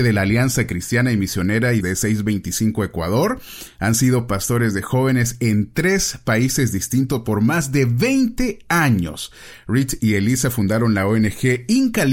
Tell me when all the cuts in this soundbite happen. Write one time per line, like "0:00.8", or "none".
0:01.8